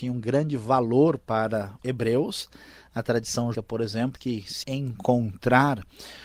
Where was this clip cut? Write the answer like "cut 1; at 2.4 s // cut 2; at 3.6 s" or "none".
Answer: cut 1; at 1.8 s // cut 2; at 3.5 s // cut 3; at 4.2 s // cut 4; at 4.6 s